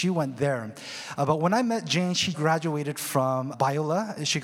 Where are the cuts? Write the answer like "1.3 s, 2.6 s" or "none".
2.3 s, 3.5 s